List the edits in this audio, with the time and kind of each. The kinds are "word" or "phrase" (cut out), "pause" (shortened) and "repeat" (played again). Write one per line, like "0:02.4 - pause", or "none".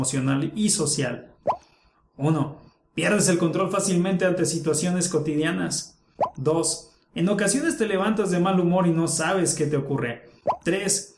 none